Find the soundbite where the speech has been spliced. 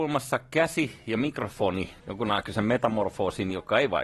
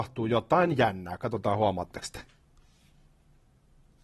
first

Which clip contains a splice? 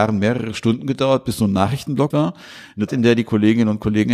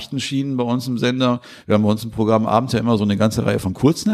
first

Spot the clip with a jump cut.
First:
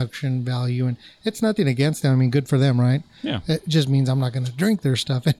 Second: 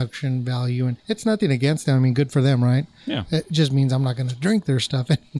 second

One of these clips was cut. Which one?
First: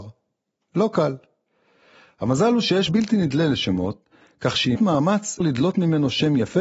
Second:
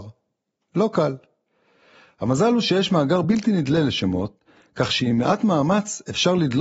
first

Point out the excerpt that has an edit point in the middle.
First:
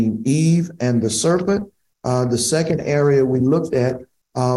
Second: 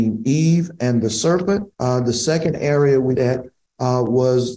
second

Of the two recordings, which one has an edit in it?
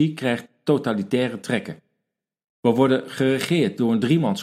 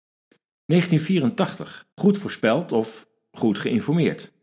second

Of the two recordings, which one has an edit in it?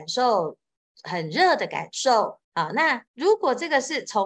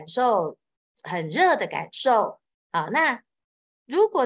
first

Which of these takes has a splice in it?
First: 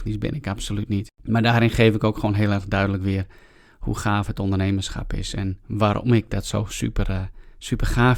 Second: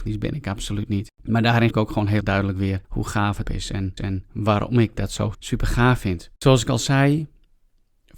second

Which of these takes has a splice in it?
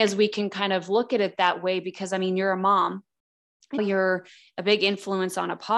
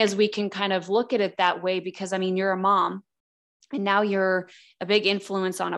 first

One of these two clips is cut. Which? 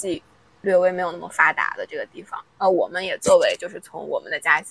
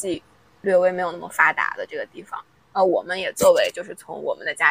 first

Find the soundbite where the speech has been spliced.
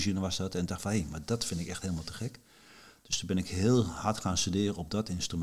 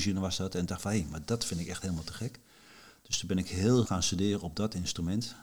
second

